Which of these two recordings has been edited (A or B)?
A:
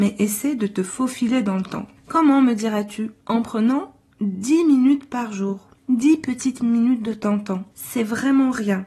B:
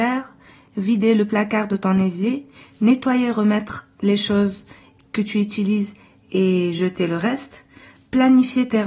A